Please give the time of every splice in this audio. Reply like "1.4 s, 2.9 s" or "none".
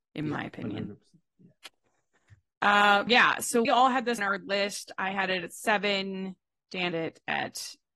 3.1 s, 3.7 s, 4.2 s, 6.9 s